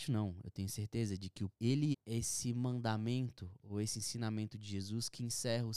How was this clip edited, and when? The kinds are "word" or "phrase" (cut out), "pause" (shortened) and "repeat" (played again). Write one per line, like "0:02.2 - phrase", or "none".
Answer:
0:01.5 - word
0:01.9 - word